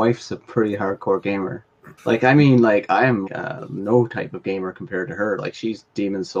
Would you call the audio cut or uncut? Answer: cut